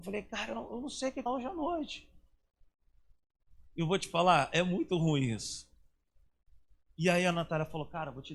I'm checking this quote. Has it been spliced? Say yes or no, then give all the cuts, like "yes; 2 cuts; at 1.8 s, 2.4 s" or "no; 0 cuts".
yes; 2 cuts; at 1.3 s, 3.7 s